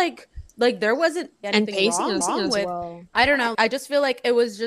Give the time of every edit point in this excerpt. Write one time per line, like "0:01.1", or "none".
0:01.4
0:02.2
0:03.1
0:03.5